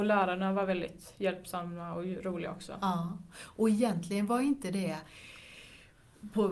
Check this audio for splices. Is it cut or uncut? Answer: uncut